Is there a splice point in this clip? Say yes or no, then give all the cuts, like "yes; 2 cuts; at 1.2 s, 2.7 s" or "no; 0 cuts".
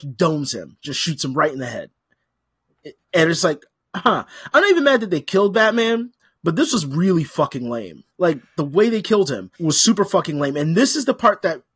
yes; 3 cuts; at 3.0 s, 8.1 s, 9.5 s